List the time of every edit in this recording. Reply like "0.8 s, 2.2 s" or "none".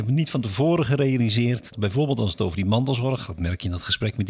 1.7 s, 3.2 s